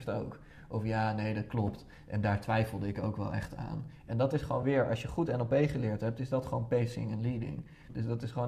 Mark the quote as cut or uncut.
uncut